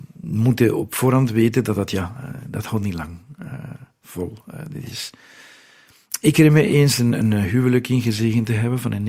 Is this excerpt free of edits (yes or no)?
yes